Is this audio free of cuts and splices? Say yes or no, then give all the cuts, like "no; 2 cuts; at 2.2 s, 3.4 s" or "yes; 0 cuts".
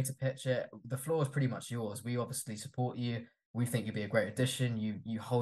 yes; 0 cuts